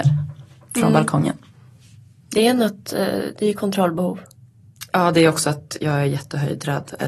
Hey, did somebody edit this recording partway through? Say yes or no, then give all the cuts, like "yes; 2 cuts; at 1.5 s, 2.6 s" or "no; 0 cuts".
no; 0 cuts